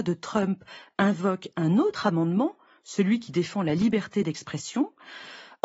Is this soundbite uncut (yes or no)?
yes